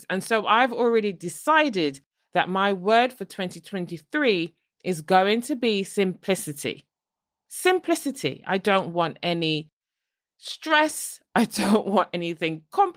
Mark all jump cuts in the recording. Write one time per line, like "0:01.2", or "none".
none